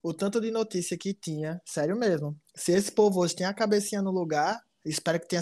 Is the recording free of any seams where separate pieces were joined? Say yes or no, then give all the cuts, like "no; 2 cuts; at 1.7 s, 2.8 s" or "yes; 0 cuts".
yes; 0 cuts